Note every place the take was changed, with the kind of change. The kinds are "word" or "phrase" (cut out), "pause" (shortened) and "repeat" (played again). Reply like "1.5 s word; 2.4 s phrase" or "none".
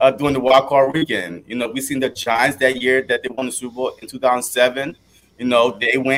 none